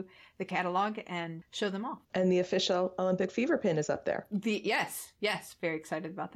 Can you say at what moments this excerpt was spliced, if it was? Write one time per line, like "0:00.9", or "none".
0:02.0